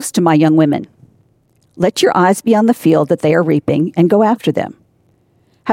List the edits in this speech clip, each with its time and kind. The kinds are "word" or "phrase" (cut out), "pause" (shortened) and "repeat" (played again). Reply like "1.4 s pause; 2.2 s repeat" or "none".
none